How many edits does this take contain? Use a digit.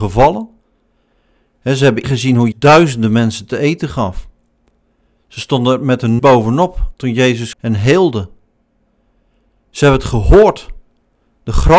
4